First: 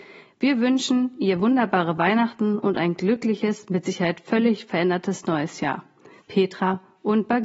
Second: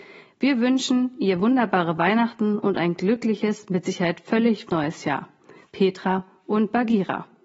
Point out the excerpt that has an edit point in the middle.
second; 1 cut; at 4.7 s

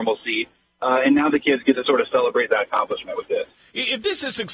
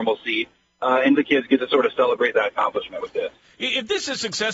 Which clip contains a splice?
second; 1 cut; at 1.2 s

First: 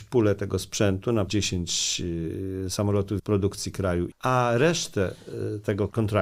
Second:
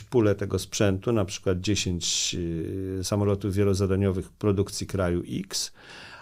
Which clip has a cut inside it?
first; 3 cuts; at 1.3 s, 3.2 s, 4.1 s

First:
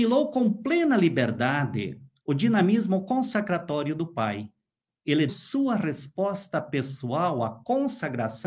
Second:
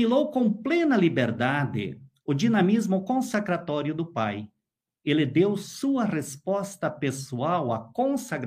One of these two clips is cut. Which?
first; 1 cut; at 5.3 s

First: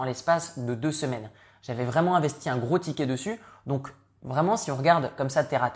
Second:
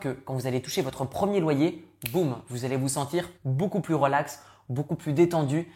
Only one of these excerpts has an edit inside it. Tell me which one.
second; 1 cut; at 3.3 s

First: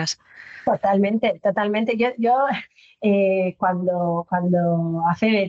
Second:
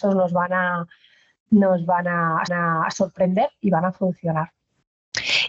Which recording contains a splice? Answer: second; 1 cut; at 2.5 s

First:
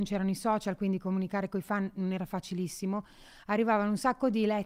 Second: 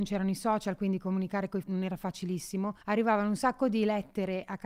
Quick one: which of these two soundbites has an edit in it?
second; 2 cuts; at 1.6 s, 2.8 s

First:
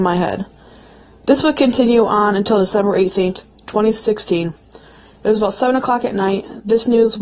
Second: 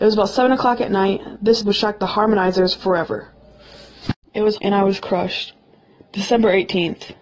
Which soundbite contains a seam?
second; 2 cuts; at 1.6 s, 4.6 s

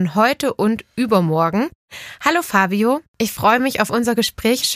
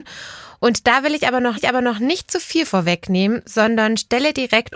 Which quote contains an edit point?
second; 1 cut; at 1.6 s

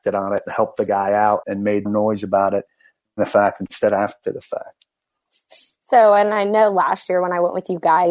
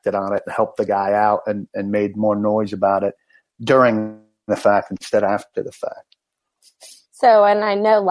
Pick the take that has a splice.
first; 3 cuts; at 1.4 s, 1.9 s, 3.0 s

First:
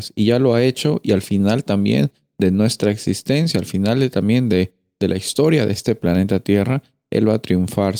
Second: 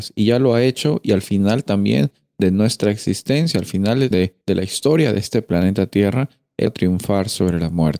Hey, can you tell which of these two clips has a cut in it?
second; 3 cuts; at 4.1 s, 4.4 s, 6.7 s

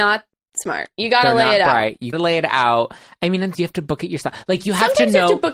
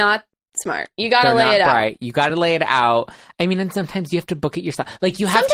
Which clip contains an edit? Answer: first; 2 cuts; at 2.1 s, 3.5 s

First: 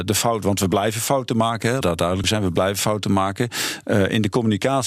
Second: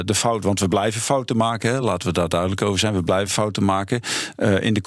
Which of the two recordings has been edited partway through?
first; 2 cuts; at 1.8 s, 2.2 s

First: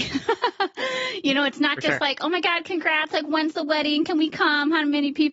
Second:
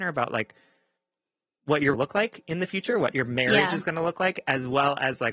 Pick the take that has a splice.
second; 1 cut; at 1.9 s

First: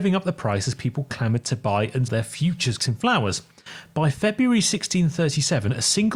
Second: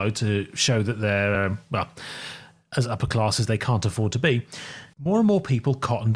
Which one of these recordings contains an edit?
first; 2 cuts; at 2.1 s, 2.8 s

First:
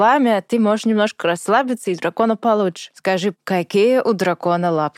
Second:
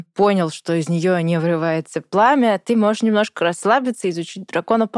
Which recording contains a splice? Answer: first; 2 cuts; at 2.0 s, 3.3 s

